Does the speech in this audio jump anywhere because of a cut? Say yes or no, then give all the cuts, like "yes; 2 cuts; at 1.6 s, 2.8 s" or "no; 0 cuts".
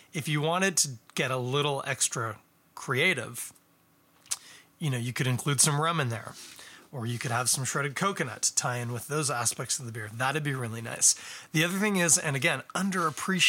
no; 0 cuts